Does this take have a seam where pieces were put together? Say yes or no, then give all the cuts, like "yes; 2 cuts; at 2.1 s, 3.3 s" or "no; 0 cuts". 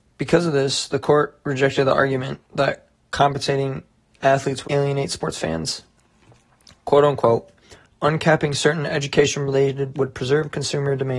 yes; 3 cuts; at 2.5 s, 4.6 s, 9.9 s